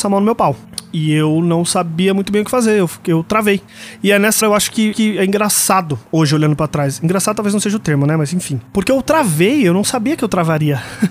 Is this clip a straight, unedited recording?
no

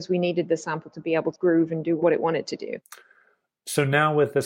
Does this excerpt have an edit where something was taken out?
yes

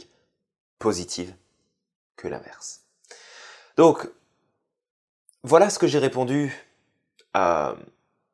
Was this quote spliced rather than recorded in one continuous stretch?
no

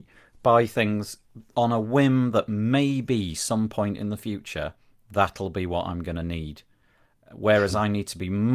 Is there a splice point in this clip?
no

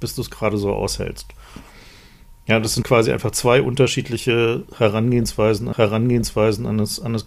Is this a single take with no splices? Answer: no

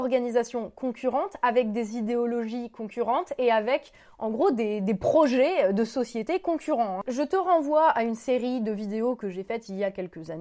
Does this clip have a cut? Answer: no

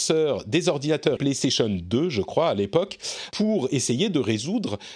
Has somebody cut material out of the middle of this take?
yes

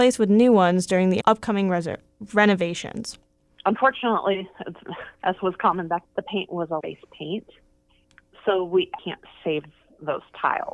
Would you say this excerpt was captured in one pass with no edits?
no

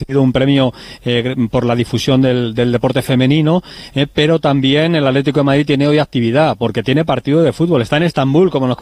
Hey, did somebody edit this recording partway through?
no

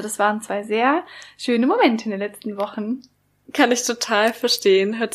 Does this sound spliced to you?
no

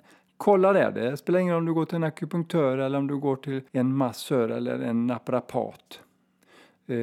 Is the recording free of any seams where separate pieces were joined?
no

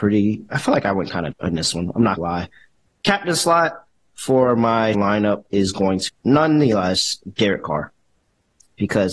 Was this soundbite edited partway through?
yes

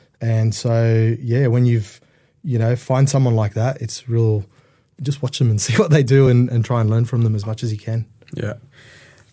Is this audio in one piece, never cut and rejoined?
yes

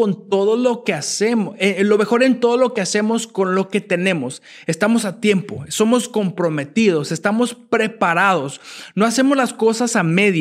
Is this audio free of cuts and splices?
yes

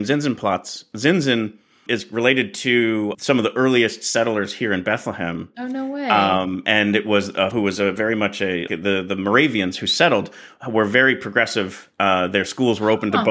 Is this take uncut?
no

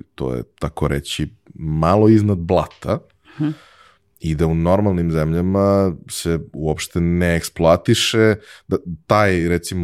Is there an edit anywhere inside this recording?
no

